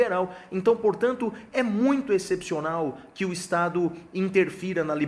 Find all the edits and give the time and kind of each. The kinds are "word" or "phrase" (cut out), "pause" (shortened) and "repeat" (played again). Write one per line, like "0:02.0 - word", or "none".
none